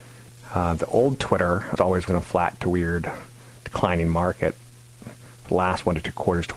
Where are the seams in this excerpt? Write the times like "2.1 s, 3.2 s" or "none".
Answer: 1.8 s, 2.1 s